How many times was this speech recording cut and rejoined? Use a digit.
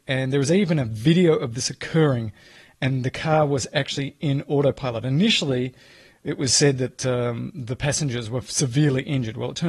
0